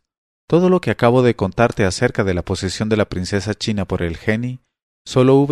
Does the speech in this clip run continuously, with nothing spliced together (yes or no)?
yes